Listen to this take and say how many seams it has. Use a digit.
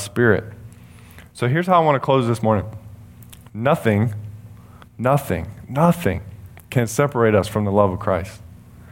1